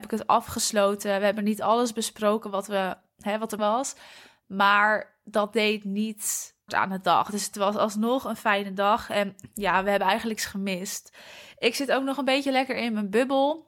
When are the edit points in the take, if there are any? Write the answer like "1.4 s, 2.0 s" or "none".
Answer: 3.6 s, 6.7 s, 10.4 s